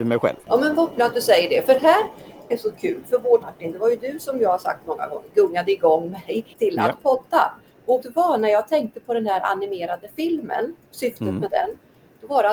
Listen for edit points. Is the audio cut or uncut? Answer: cut